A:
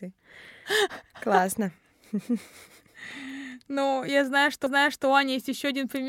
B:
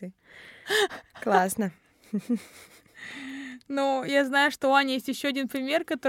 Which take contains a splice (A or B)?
A